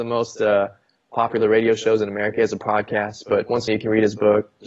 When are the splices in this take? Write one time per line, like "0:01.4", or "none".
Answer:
0:03.7

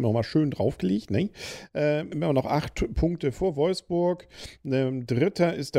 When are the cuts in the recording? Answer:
0:02.1

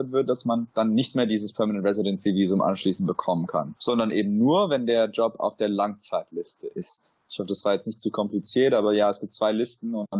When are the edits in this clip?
none

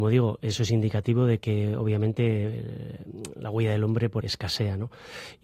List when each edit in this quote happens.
0:04.2

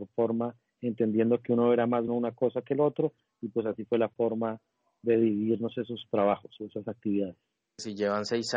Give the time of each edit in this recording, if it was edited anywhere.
0:02.1

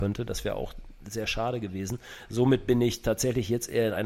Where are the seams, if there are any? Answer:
none

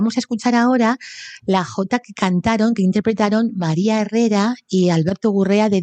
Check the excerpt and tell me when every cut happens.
none

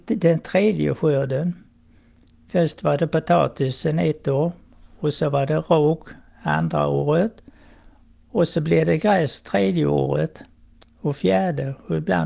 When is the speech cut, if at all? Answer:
none

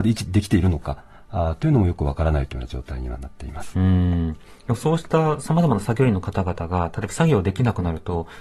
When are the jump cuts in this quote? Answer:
none

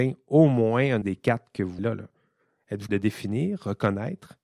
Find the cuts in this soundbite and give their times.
0:01.0
0:01.8
0:02.9

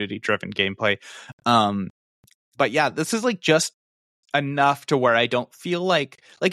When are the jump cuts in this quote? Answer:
none

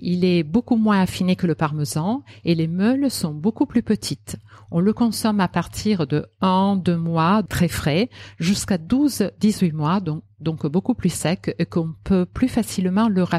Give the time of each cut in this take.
0:07.5

